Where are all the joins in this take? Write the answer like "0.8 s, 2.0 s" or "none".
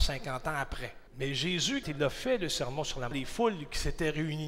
1.1 s, 1.8 s, 3.1 s